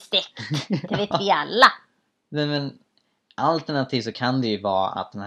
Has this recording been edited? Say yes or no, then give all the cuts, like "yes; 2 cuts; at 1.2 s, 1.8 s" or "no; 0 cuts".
no; 0 cuts